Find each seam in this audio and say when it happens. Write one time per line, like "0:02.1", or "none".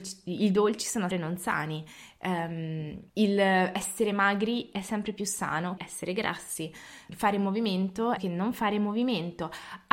0:01.1
0:03.1
0:05.8
0:07.1
0:08.2